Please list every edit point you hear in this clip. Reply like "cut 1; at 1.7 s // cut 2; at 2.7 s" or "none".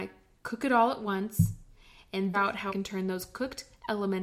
cut 1; at 2.3 s // cut 2; at 2.7 s